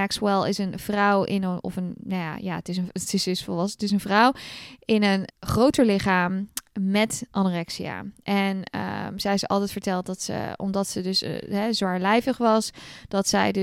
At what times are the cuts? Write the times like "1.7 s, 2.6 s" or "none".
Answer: 5.3 s